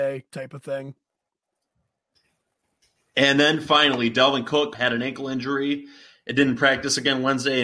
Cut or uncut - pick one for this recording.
cut